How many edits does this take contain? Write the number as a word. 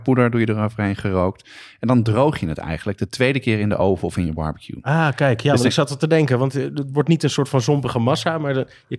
zero